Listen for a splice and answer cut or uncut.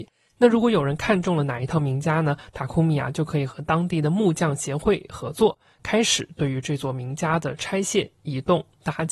uncut